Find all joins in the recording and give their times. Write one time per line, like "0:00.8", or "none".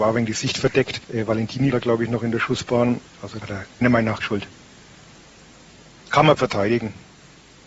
0:01.0
0:01.7
0:03.4
0:03.8
0:04.2
0:06.4